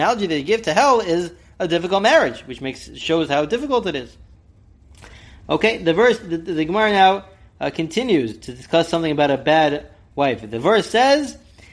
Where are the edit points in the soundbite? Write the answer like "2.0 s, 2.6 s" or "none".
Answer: none